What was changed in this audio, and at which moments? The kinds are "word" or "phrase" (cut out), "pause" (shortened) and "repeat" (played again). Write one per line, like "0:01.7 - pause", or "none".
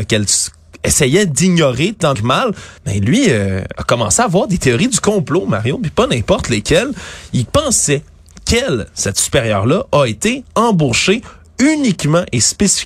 0:02.1 - word
0:02.8 - pause